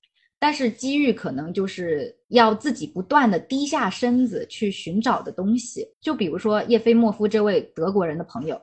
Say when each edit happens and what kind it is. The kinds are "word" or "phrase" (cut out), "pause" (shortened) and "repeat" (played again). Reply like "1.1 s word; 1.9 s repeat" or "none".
2.2 s pause; 5.9 s pause